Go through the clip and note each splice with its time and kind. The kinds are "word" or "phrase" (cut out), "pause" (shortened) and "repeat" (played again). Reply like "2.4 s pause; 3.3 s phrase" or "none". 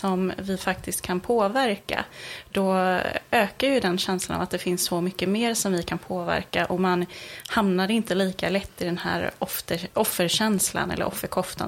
none